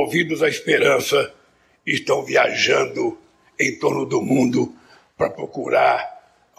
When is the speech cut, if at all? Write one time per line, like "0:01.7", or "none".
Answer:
none